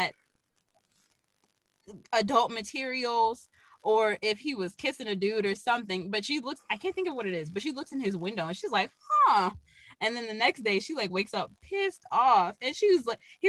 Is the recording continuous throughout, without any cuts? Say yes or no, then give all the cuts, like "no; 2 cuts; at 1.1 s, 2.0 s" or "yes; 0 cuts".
yes; 0 cuts